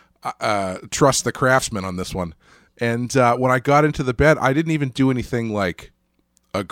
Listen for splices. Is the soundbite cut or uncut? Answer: uncut